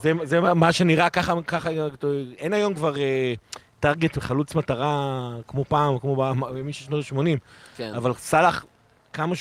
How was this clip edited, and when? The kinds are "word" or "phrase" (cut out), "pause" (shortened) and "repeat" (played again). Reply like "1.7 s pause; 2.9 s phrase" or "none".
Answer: none